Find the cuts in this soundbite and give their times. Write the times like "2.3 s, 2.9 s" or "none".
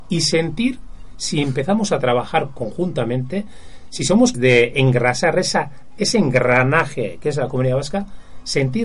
4.3 s